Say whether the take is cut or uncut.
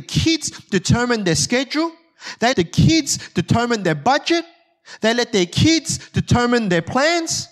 cut